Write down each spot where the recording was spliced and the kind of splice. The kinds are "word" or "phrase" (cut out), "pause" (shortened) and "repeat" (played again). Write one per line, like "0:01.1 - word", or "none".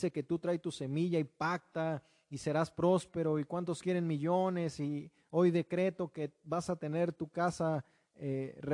none

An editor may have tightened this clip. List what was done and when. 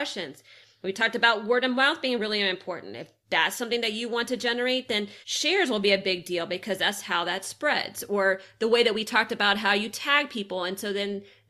0:05.2 - pause

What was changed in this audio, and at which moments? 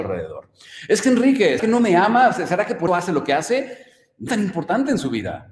0:01.6 - word
0:02.9 - word
0:04.3 - word

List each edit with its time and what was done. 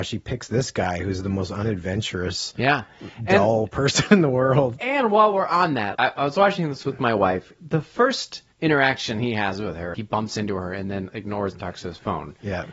0:05.9 - word
0:07.6 - phrase
0:08.5 - pause
0:09.9 - word
0:11.5 - word

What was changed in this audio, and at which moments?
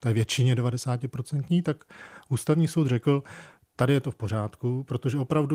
none

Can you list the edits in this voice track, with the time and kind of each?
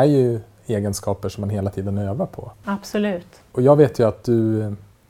0:02.5 - pause

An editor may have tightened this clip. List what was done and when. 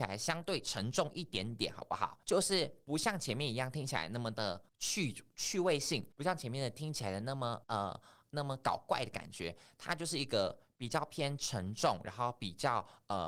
0:02.2 - pause
0:04.7 - pause
0:06.1 - pause
0:07.6 - pause

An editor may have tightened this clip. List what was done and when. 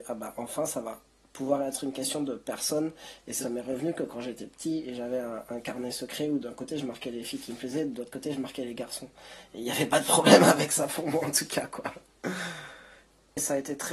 0:03.4 - phrase

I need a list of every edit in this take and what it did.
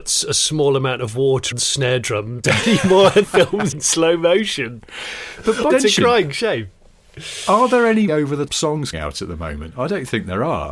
0:01.5 - word
0:02.4 - word
0:03.2 - word
0:03.7 - word
0:05.7 - word
0:08.1 - word
0:08.5 - word
0:08.9 - word

